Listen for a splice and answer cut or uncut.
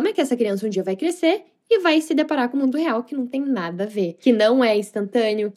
uncut